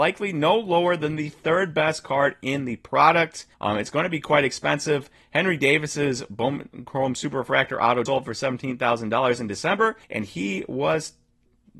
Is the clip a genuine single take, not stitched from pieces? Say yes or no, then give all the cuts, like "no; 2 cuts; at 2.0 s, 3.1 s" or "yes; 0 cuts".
no; 3 cuts; at 3.5 s, 8.1 s, 10.0 s